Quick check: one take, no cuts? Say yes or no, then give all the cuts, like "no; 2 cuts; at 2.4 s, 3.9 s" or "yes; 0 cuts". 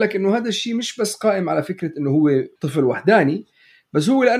no; 1 cut; at 2.6 s